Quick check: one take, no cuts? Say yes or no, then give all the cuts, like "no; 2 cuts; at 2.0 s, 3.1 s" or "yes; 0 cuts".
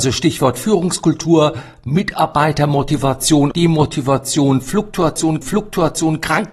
no; 2 cuts; at 3.5 s, 5.4 s